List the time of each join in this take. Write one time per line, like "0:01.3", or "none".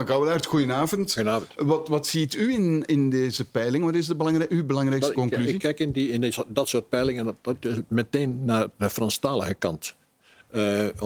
none